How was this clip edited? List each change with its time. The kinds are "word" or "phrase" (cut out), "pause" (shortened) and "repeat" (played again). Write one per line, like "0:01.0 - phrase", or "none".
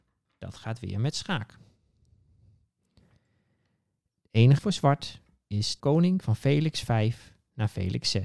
0:04.6 - word
0:05.8 - word
0:06.2 - word